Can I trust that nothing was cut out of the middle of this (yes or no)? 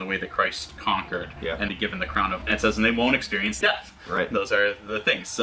no